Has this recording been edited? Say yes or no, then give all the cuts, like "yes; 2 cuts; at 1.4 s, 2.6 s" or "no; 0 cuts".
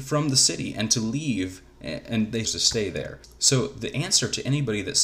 yes; 1 cut; at 2.4 s